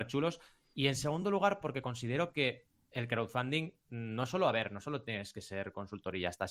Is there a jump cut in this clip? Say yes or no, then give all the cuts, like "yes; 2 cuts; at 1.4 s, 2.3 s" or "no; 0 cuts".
no; 0 cuts